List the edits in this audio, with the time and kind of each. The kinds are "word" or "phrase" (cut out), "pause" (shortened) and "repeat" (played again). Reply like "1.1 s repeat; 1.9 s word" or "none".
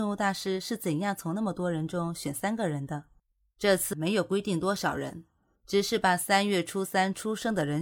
3.9 s word